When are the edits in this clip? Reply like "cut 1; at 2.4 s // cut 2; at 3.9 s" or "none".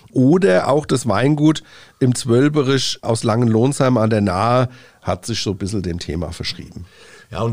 none

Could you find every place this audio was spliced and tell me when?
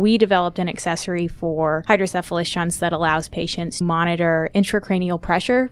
cut 1; at 3.8 s

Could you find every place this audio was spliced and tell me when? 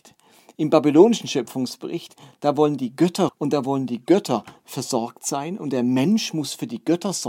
cut 1; at 3.3 s

